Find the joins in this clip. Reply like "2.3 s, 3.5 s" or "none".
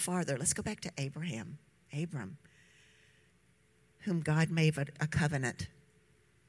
none